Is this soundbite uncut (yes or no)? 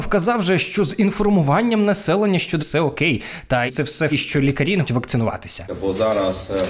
no